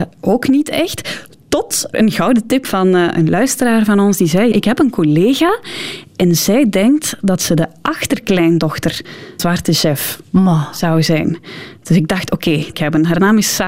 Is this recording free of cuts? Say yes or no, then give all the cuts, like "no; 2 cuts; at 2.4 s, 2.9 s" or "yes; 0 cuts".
no; 5 cuts; at 1.9 s, 2.6 s, 4.5 s, 9.4 s, 12.7 s